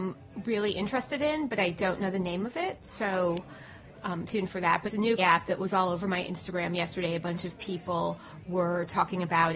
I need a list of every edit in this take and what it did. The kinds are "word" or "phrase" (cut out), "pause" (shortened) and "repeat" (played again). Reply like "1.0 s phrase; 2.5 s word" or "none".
4.3 s word; 4.9 s word; 5.2 s word